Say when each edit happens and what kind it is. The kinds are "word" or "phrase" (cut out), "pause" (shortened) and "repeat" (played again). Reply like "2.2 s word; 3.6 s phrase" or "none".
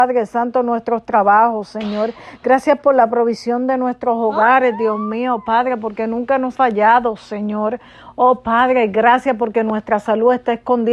6.5 s word